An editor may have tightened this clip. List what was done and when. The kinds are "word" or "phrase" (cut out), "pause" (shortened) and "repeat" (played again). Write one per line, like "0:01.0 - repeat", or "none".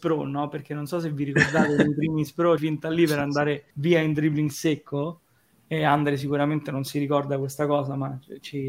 0:02.6 - phrase
0:03.7 - pause